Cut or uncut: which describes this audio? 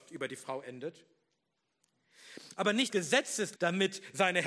cut